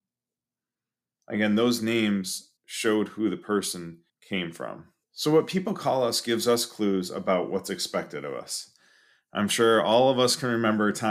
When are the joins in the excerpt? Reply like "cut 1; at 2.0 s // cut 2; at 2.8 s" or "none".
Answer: cut 1; at 2.6 s // cut 2; at 4.1 s // cut 3; at 5.0 s